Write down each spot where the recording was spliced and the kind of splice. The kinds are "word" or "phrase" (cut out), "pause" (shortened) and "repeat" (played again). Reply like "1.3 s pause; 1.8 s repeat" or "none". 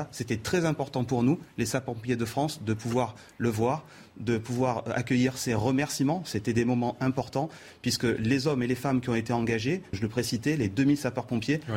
9.9 s word